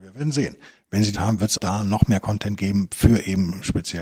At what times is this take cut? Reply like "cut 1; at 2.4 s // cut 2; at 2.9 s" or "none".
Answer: cut 1; at 1.1 s // cut 2; at 1.6 s